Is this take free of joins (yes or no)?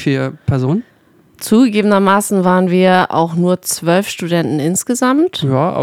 yes